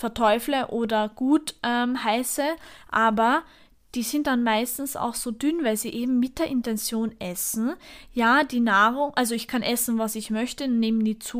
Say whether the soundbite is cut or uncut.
uncut